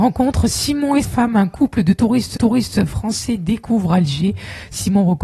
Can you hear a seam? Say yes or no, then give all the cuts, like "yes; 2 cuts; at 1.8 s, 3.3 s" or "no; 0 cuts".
yes; 2 cuts; at 1.0 s, 2.4 s